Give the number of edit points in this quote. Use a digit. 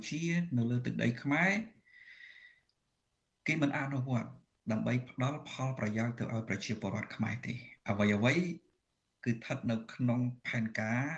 0